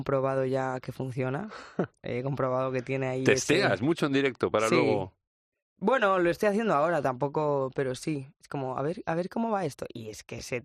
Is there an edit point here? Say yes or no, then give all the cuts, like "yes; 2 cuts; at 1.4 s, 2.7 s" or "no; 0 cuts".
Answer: no; 0 cuts